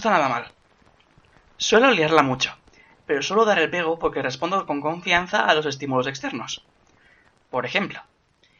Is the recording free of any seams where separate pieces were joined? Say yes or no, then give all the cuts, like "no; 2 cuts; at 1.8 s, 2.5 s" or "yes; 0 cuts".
yes; 0 cuts